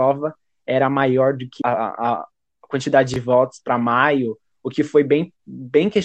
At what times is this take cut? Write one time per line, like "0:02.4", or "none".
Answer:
0:01.6